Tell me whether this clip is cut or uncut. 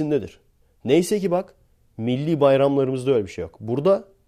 uncut